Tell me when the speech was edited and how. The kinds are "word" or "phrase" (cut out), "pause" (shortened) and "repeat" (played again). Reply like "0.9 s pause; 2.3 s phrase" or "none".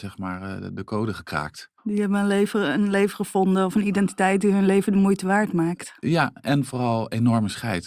1.8 s pause